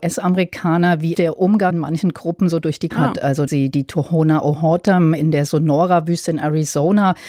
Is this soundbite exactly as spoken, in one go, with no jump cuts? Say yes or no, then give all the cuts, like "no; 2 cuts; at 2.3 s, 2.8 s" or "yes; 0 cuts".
no; 4 cuts; at 1.1 s, 1.7 s, 2.9 s, 3.5 s